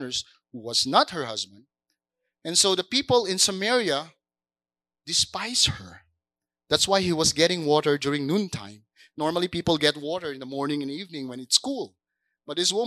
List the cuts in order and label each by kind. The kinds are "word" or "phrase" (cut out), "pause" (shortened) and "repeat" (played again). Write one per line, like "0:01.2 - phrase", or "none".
none